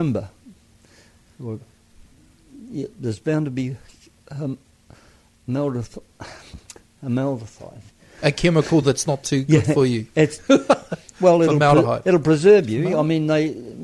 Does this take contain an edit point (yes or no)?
no